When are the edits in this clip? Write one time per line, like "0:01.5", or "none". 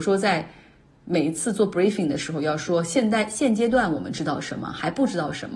none